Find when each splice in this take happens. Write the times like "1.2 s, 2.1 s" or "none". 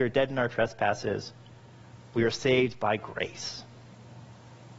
none